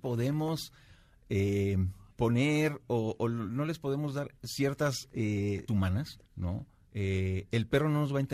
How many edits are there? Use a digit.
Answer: 4